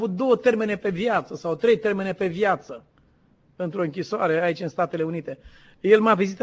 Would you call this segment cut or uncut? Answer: uncut